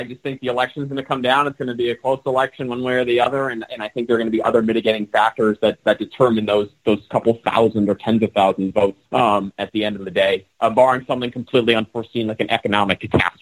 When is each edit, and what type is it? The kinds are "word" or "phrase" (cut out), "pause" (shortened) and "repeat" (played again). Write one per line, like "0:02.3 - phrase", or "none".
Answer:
0:09.1 - pause